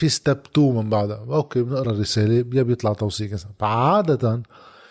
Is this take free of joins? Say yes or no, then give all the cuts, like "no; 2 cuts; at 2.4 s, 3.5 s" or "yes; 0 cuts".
yes; 0 cuts